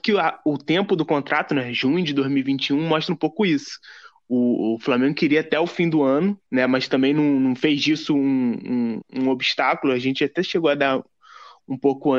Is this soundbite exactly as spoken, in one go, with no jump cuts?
no; 2 cuts; at 6.5 s, 9.0 s

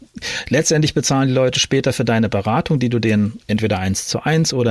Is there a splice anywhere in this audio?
no; 0 cuts

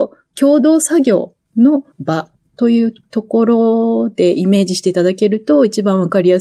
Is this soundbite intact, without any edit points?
no; 1 cut; at 1.9 s

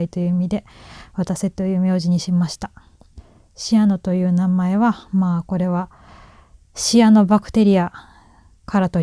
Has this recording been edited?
no; 0 cuts

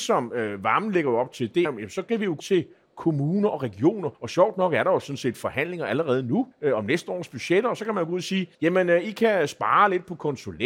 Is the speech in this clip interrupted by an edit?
yes; 5 cuts; at 1.6 s, 2.4 s, 4.1 s, 6.5 s, 8.5 s

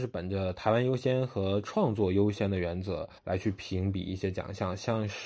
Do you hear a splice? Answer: yes; 1 cut; at 3.2 s

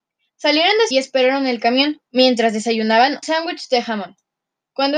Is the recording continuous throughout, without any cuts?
no; 3 cuts; at 0.9 s, 2.0 s, 3.2 s

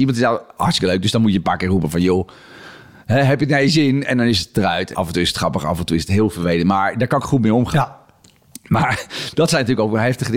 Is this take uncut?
no; 1 cut; at 4.9 s

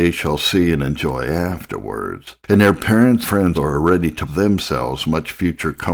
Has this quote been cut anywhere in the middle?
yes; 4 cuts; at 2.4 s, 3.2 s, 3.5 s, 4.3 s

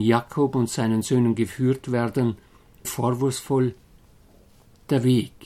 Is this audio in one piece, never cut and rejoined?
no; 1 cut; at 2.8 s

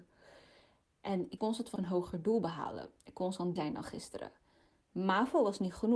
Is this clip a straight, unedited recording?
no; 3 cuts; at 1.4 s, 1.8 s, 3.6 s

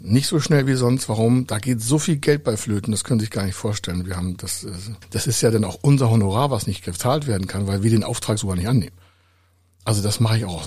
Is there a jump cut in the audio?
no; 0 cuts

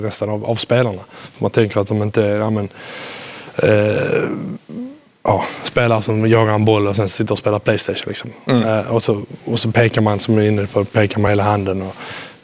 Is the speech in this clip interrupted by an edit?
no; 0 cuts

